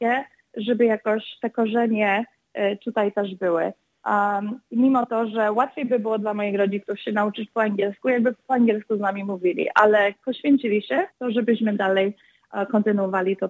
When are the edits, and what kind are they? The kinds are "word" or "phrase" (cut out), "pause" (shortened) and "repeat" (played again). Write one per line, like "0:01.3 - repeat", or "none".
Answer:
0:11.1 - pause